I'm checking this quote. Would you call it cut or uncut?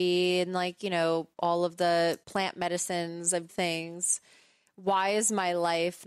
cut